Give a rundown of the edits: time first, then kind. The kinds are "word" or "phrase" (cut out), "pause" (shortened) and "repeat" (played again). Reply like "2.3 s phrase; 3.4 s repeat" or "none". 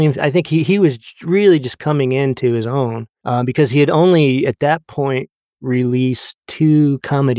6.4 s pause